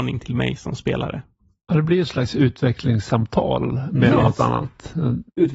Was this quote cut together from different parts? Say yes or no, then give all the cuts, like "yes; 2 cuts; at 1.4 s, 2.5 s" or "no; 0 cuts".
no; 0 cuts